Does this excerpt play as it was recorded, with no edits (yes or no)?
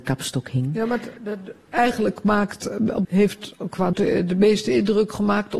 no